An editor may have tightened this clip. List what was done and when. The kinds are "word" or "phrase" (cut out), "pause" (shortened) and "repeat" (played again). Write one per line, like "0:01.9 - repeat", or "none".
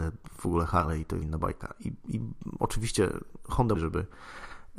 0:01.2 - word
0:03.7 - phrase